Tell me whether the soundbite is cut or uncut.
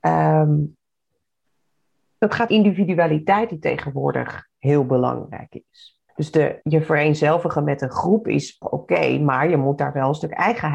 cut